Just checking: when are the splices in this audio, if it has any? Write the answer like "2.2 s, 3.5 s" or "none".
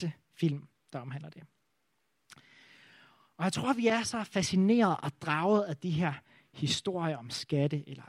none

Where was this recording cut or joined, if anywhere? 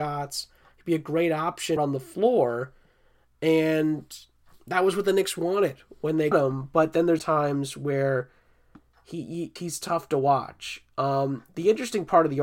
1.8 s, 6.3 s, 7.2 s, 9.6 s

